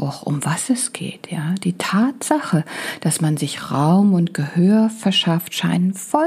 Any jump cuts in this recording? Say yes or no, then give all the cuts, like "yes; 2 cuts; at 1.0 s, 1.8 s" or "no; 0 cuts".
no; 0 cuts